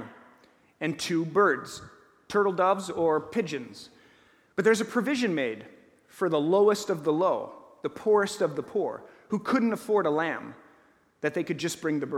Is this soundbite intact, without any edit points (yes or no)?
yes